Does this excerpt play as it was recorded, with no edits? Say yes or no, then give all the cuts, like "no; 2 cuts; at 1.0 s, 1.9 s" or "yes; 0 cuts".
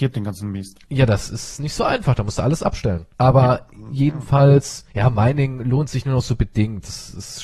no; 1 cut; at 3.1 s